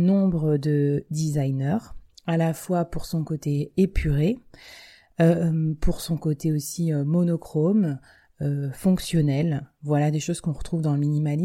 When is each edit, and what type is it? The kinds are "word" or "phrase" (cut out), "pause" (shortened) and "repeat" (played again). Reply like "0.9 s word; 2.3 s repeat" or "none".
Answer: none